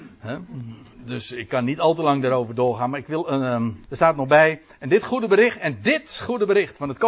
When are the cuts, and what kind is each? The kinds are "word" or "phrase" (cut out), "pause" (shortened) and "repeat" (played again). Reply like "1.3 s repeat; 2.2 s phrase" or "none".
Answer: 0.9 s pause; 3.9 s word